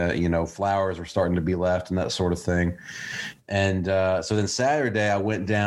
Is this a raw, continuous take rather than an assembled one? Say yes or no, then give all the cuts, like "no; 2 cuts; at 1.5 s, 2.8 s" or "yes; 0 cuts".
yes; 0 cuts